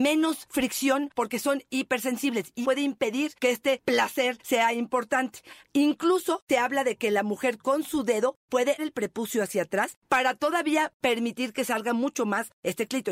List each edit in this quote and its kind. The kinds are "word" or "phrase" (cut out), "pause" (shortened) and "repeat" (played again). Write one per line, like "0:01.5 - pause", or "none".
0:02.6 - word
0:08.8 - word